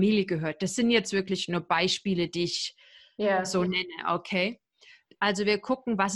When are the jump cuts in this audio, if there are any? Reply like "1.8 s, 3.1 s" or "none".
none

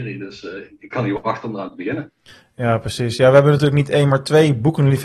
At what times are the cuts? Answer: none

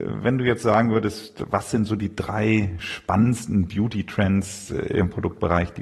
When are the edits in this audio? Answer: none

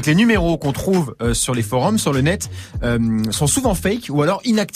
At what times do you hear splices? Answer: none

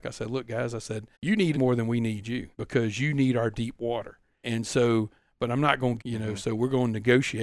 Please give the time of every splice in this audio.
1.1 s, 1.5 s, 2.5 s, 4.4 s, 6.0 s

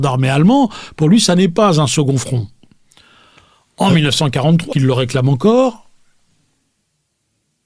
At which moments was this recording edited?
4.7 s

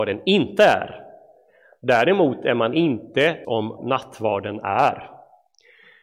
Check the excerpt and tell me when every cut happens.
3.4 s, 3.8 s

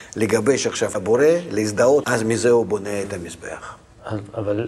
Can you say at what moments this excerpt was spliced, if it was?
0.9 s, 2.0 s

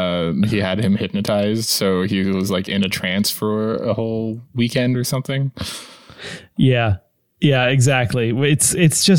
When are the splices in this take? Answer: none

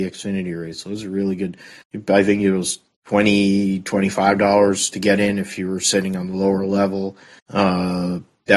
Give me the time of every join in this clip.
none

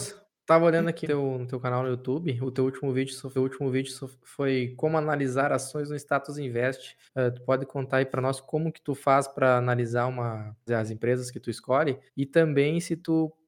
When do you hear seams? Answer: 1.0 s, 3.4 s, 7.1 s, 10.7 s, 12.1 s

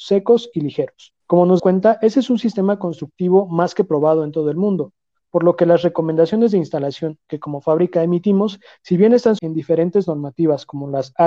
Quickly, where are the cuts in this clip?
1.2 s, 1.6 s, 9.4 s

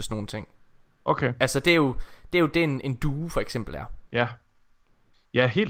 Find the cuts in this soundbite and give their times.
4.1 s

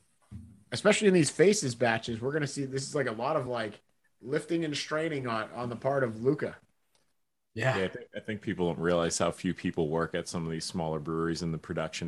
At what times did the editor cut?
none

